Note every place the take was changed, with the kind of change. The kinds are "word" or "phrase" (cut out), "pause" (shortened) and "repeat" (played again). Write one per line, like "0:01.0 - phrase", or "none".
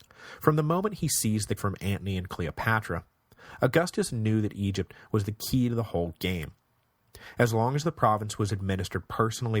0:01.6 - word